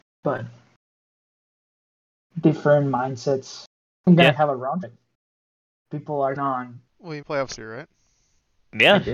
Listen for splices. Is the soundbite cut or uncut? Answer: cut